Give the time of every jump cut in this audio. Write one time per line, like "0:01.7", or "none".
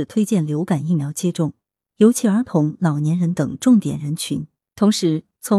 none

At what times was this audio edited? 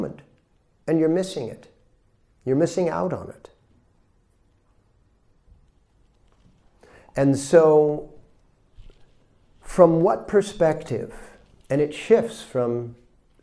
none

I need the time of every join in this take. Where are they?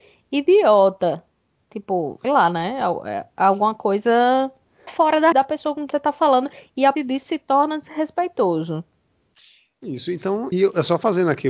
0:02.2
0:04.9
0:05.3
0:05.9
0:06.9
0:10.5

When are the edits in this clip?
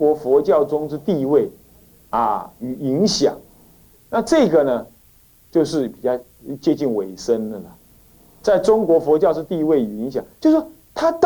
none

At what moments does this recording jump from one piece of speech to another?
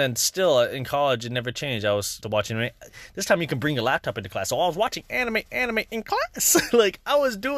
0:02.2
0:05.5

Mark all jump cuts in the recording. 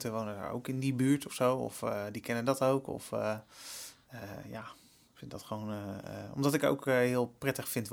none

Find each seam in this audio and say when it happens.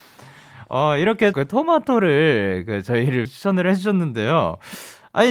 0:01.3
0:03.3

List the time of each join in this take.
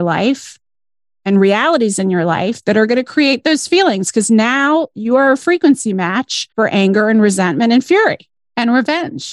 0:06.5

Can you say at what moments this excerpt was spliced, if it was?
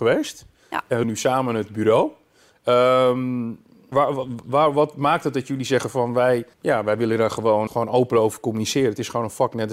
0:01.0
0:03.9
0:06.5
0:07.7

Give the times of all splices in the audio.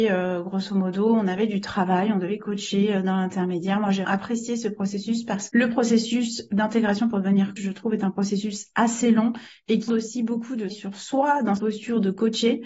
0:04.0
0:05.5
0:07.6
0:09.9
0:10.7
0:11.6

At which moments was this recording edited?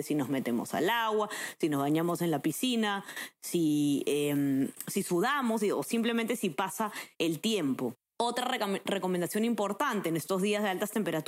0:07.1

